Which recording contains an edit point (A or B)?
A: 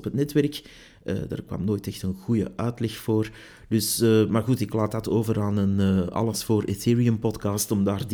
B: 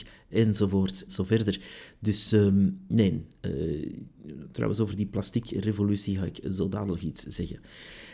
B